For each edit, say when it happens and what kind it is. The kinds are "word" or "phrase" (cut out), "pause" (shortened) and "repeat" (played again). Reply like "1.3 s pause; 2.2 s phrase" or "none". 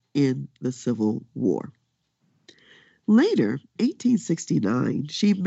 3.8 s word